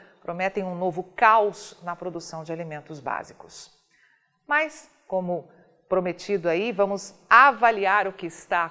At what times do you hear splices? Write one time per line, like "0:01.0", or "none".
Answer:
none